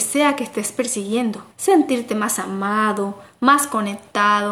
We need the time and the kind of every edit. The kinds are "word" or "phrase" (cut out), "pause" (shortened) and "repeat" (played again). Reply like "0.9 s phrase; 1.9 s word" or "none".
1.5 s pause